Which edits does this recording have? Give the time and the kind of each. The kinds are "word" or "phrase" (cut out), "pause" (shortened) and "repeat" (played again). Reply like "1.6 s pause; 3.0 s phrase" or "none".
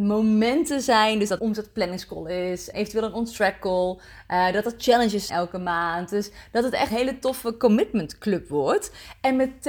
1.4 s phrase; 2.7 s word; 5.3 s word; 6.9 s word